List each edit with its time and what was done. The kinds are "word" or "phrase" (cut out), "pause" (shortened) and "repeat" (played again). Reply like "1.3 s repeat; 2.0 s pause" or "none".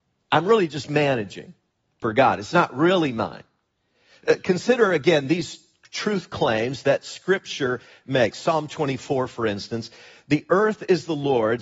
1.8 s pause